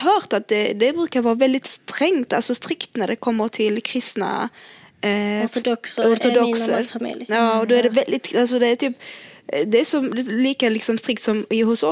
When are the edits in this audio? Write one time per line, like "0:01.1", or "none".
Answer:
none

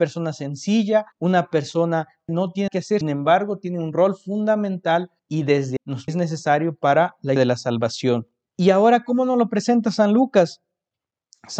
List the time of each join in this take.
0:01.1
0:02.3
0:02.7
0:03.0
0:05.2
0:05.8
0:06.1
0:07.4
0:08.5

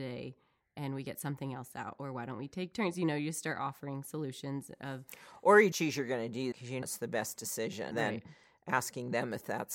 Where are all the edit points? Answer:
0:05.7
0:06.5
0:06.8
0:07.9

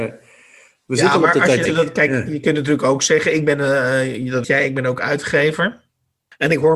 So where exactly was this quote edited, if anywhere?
0:01.7
0:04.4

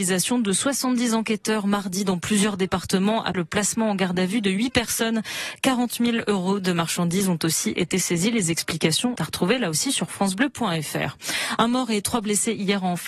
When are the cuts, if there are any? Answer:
0:03.3
0:09.2

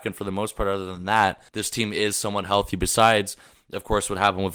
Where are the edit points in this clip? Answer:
0:01.5

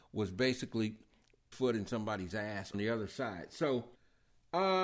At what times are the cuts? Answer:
0:01.5
0:02.7

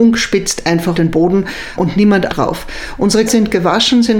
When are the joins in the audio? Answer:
0:00.9
0:01.8
0:02.3
0:03.3

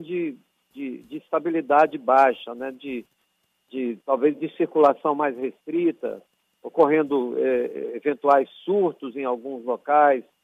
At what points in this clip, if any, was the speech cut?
none

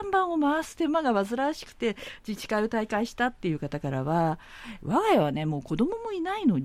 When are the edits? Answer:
0:04.8

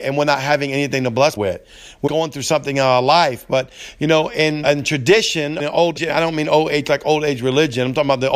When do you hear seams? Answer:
0:01.4
0:02.1
0:04.6
0:05.6
0:06.0

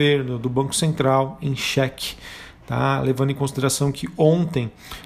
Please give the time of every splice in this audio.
none

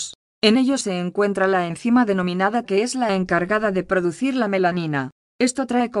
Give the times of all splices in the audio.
0:02.7

